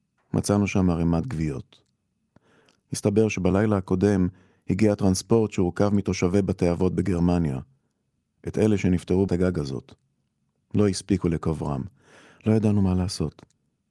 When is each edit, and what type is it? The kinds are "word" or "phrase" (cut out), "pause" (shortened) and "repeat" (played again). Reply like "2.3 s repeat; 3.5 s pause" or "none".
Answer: 9.3 s phrase